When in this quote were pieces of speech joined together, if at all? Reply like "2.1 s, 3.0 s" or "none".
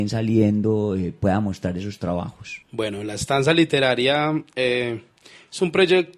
2.6 s